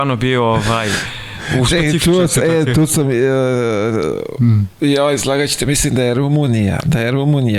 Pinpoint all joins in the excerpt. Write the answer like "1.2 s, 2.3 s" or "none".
none